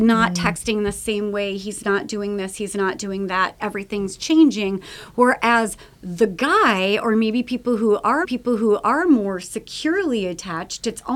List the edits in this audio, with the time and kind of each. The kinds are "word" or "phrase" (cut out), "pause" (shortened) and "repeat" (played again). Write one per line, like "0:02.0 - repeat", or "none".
0:08.2 - repeat

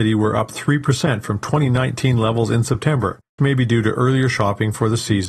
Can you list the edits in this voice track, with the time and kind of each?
0:03.4 - word

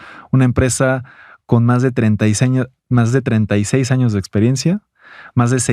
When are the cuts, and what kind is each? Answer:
none

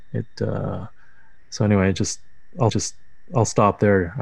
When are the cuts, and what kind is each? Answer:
0:02.7 - repeat

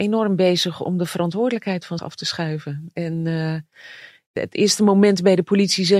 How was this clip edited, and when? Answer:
0:02.0 - word

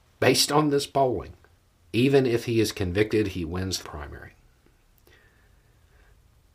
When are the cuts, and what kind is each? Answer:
0:01.6 - pause
0:03.8 - word

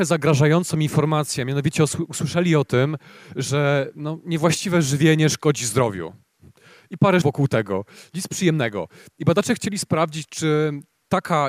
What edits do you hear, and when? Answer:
0:07.2 - word

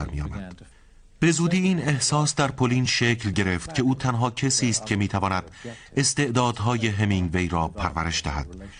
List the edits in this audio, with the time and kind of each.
none

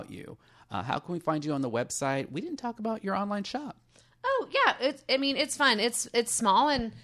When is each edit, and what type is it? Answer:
none

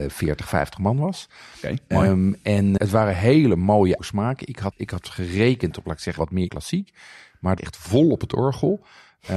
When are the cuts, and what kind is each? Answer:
0:02.8 - word
0:04.0 - word
0:04.7 - word
0:06.2 - word
0:06.5 - word
0:07.6 - word

